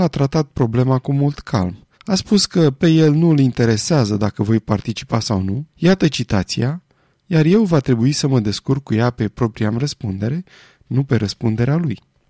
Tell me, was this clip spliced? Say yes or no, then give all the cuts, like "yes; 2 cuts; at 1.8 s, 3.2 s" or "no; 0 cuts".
yes; 2 cuts; at 1.9 s, 5.7 s